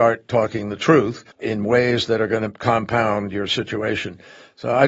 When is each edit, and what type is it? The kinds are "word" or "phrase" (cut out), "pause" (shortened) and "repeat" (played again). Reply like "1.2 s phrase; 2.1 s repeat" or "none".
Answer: 1.3 s pause